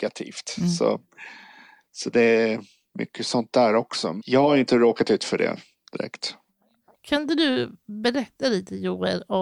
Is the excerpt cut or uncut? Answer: uncut